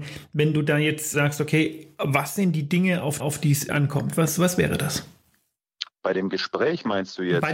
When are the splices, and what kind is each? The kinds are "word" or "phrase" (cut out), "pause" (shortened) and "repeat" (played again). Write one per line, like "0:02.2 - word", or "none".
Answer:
0:01.1 - word
0:03.2 - repeat
0:03.7 - word